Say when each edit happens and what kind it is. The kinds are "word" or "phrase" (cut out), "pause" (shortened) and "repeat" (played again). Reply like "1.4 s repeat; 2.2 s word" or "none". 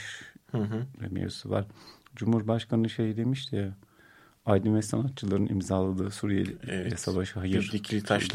none